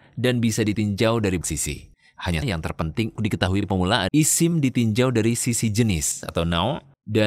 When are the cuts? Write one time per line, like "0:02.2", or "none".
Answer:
0:01.4
0:02.4
0:03.2
0:04.1